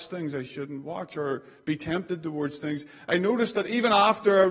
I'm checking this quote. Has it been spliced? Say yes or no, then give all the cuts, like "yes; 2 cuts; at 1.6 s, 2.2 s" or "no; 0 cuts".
no; 0 cuts